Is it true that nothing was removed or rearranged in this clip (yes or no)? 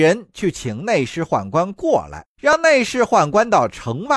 no